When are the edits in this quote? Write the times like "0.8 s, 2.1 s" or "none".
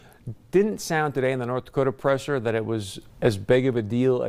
3.1 s